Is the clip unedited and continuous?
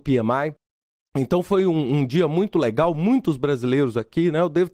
yes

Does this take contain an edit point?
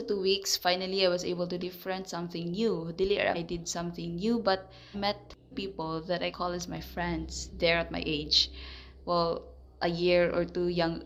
yes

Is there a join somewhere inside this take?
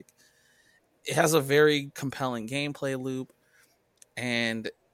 no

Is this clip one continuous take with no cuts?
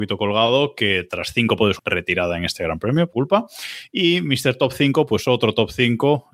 no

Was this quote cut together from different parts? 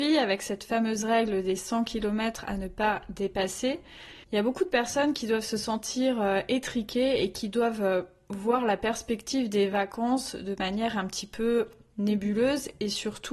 yes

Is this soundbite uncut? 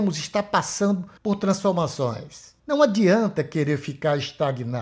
no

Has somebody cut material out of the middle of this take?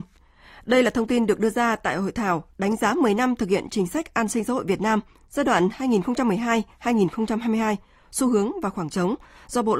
no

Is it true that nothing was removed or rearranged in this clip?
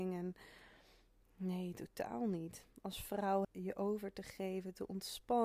no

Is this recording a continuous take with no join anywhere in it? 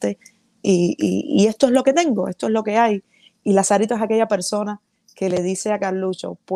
yes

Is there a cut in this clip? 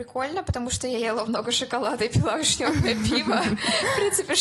no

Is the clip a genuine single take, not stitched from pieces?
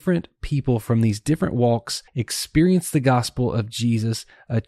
no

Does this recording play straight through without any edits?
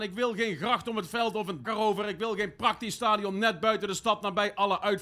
no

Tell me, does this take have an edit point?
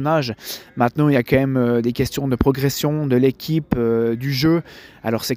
no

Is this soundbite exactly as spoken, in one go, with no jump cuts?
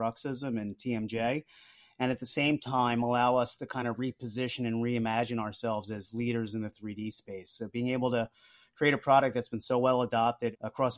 yes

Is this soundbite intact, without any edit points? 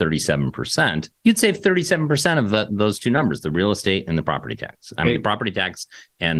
no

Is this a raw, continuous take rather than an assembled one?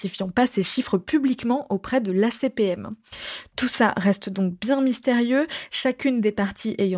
yes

